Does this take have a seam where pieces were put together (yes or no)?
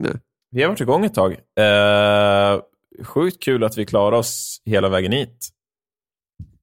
no